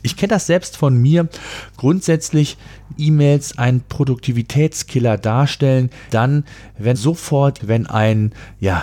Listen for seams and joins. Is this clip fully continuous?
no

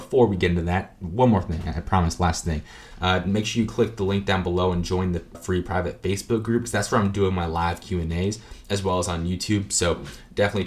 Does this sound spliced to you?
yes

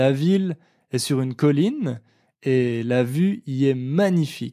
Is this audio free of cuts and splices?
yes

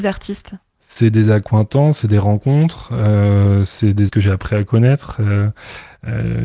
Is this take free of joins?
no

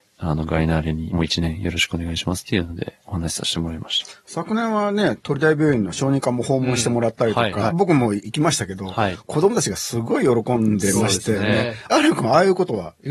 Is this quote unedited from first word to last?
no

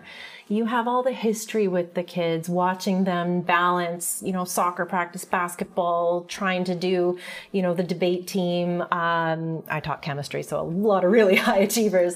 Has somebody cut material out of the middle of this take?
no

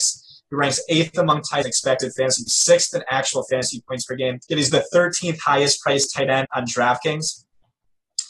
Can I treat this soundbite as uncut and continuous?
no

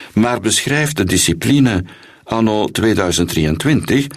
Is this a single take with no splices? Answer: yes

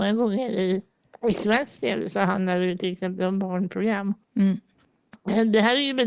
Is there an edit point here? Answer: no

